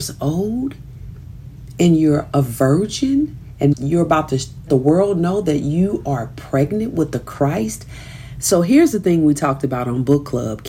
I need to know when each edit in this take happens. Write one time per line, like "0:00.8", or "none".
0:03.7
0:04.7